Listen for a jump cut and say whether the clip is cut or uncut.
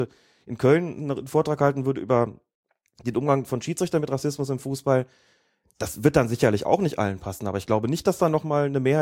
uncut